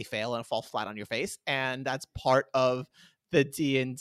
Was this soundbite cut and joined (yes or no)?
no